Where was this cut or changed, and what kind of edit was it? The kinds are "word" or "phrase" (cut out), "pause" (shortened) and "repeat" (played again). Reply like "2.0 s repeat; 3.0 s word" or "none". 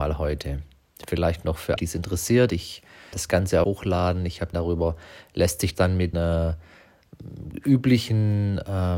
1.8 s word; 3.1 s word; 3.6 s phrase; 4.5 s word; 5.7 s word; 6.1 s word